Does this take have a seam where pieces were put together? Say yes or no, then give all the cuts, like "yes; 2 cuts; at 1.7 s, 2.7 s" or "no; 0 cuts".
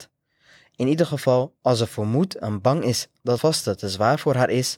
yes; 1 cut; at 3.4 s